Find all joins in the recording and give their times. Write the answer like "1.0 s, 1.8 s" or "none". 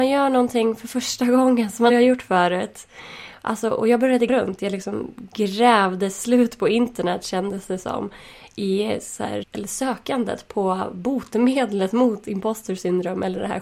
1.9 s, 4.3 s, 9.4 s